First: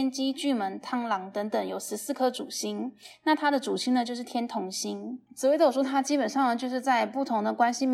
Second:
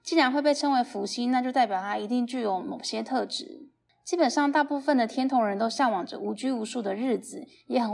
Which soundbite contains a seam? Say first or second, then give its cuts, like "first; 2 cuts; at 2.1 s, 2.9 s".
first; 1 cut; at 5.3 s